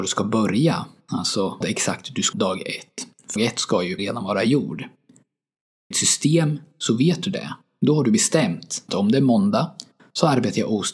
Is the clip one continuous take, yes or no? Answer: no